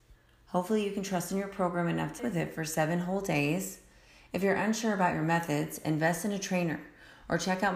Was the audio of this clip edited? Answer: yes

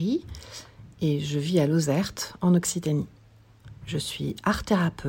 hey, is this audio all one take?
yes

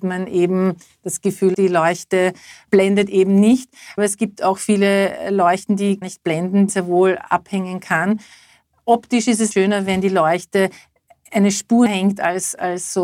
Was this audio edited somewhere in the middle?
yes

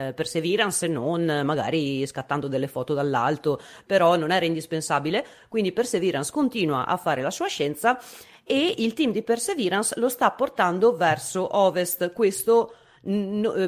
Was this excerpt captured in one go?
yes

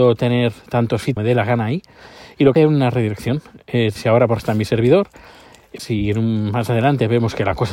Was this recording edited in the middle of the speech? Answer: yes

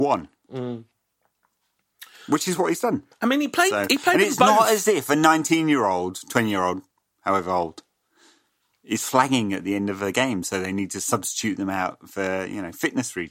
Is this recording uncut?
yes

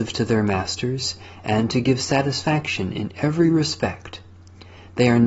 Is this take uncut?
yes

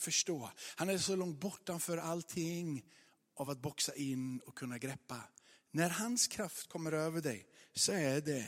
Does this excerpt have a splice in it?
no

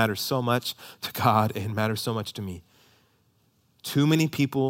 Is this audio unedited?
yes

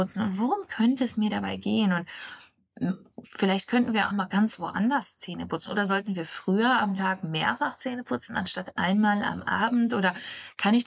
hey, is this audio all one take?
no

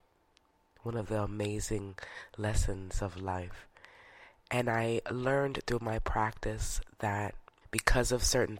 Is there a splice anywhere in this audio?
yes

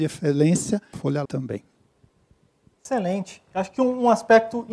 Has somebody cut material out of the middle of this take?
yes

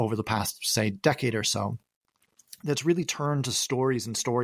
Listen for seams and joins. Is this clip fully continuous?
yes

